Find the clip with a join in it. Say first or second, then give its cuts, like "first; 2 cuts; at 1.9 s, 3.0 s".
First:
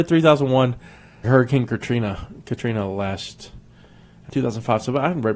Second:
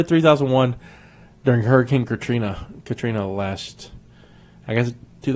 first; 2 cuts; at 1.2 s, 4.3 s